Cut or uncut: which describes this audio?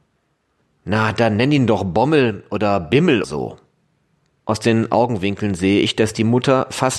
cut